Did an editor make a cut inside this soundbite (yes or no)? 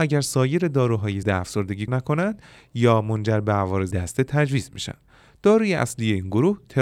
yes